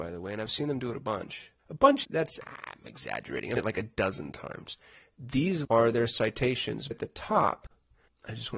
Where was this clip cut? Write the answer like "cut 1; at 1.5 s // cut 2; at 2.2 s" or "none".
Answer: cut 1; at 1.6 s // cut 2; at 2.0 s // cut 3; at 2.4 s // cut 4; at 3.6 s // cut 5; at 5.6 s // cut 6; at 6.9 s